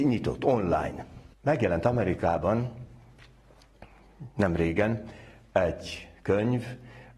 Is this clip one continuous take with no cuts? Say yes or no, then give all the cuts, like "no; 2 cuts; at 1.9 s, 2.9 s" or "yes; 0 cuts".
no; 1 cut; at 1.3 s